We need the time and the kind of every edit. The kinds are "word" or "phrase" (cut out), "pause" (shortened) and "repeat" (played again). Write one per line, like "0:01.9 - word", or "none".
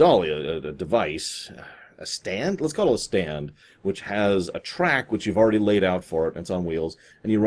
none

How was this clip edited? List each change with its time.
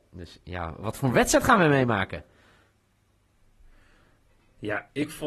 none

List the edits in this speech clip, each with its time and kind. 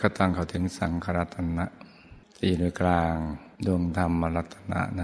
0:02.2 - pause
0:03.6 - pause

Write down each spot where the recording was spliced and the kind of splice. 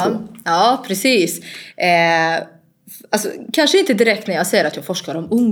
none

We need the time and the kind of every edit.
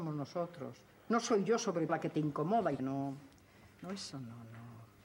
0:01.9 - word
0:02.8 - word
0:03.7 - pause
0:04.1 - word

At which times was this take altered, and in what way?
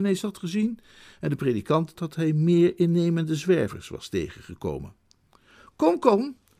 0:02.0 - word

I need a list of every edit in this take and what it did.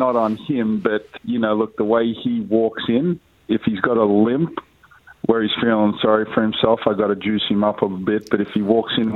0:01.2 - word

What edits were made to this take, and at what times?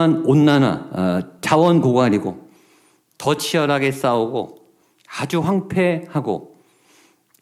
none

